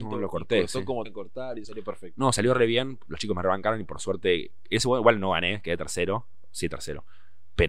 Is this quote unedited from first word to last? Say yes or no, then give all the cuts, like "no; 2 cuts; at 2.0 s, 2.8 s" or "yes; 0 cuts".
no; 2 cuts; at 1.0 s, 1.6 s